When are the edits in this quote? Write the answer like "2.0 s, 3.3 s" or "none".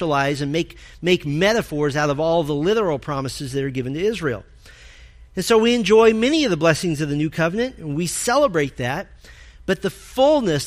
none